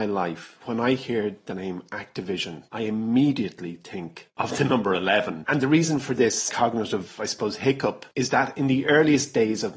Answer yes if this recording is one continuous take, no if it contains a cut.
no